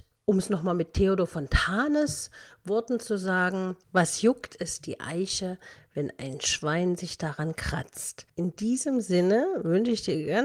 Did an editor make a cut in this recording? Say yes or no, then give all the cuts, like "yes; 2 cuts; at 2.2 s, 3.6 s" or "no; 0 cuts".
no; 0 cuts